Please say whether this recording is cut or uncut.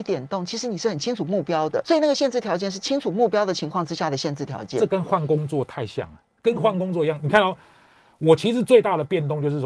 cut